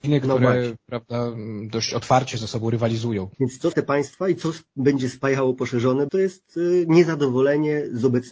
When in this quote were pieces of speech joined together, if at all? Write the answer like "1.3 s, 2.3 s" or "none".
3.3 s, 3.7 s, 6.1 s